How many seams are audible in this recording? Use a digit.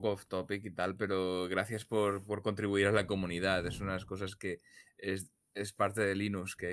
0